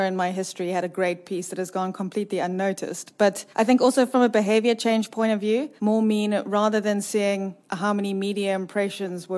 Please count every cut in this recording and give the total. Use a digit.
3